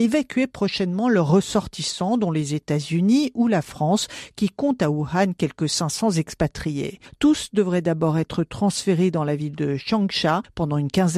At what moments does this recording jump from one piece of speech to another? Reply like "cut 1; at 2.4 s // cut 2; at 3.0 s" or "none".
none